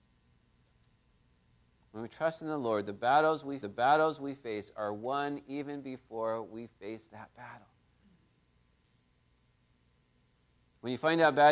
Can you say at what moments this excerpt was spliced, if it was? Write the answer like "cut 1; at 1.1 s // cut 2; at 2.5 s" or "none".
cut 1; at 3.6 s